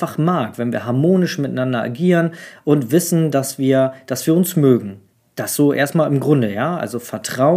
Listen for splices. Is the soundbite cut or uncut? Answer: cut